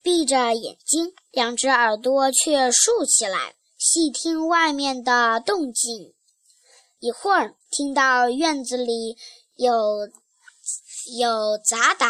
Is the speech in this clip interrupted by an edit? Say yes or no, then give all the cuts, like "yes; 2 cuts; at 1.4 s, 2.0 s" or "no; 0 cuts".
yes; 2 cuts; at 3.6 s, 7.6 s